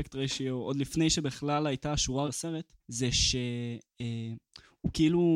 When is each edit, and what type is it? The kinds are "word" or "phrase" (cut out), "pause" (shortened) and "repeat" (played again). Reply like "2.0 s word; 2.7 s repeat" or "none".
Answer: 2.3 s word; 2.8 s pause